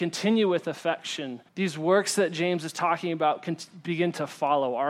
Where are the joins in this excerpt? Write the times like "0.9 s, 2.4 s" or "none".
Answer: 1.5 s